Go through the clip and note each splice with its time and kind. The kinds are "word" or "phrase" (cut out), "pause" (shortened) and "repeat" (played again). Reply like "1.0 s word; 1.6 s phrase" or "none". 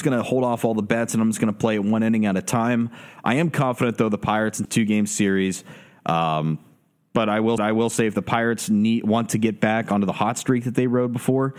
4.6 s phrase; 7.6 s repeat